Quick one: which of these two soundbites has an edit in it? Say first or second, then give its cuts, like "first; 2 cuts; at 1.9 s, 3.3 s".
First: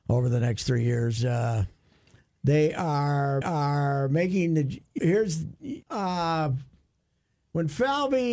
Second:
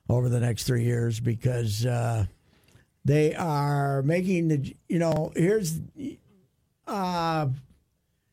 first; 4 cuts; at 1.2 s, 3.4 s, 5.0 s, 5.8 s